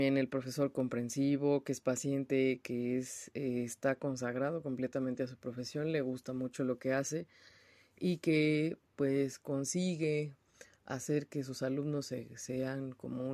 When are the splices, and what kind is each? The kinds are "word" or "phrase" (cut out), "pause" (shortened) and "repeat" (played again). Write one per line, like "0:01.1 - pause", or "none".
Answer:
none